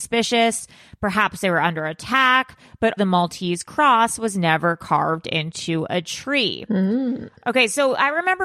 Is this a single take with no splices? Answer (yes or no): no